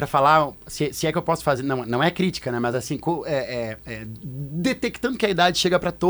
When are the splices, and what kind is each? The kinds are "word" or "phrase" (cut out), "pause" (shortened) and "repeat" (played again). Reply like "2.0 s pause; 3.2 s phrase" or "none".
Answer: none